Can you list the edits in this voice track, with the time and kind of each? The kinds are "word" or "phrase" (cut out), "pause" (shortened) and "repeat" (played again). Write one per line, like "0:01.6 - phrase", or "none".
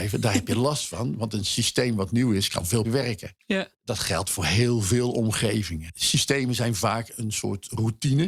0:02.8 - word